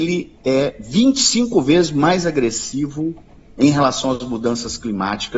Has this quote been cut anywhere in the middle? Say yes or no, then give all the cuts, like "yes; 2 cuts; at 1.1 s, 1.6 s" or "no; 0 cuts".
no; 0 cuts